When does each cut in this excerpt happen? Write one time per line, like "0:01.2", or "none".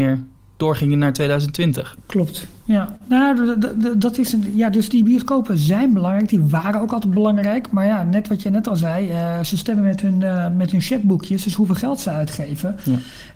none